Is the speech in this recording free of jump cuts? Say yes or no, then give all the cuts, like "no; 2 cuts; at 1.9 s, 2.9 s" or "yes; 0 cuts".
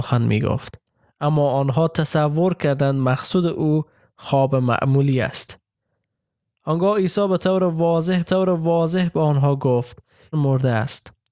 no; 2 cuts; at 8.3 s, 10.3 s